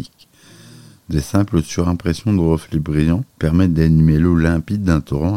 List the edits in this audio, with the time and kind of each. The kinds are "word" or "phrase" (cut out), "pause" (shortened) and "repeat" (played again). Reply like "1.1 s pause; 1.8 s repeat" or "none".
3.3 s pause